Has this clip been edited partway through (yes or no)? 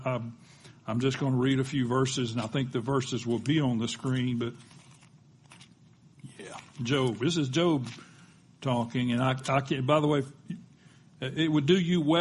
no